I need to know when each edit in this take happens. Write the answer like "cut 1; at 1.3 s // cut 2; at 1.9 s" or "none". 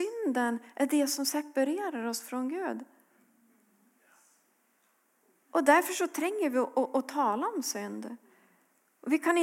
none